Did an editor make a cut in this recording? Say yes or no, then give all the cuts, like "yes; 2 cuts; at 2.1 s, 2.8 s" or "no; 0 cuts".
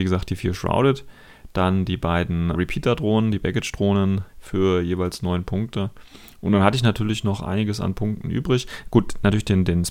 yes; 2 cuts; at 2.5 s, 4.3 s